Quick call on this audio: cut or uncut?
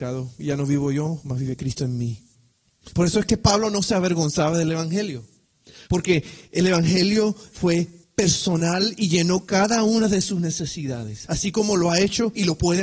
uncut